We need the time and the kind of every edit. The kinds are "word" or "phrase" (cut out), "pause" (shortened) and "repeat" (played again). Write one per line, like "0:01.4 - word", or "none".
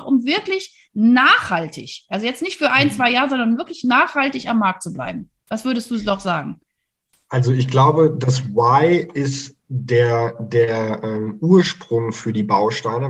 none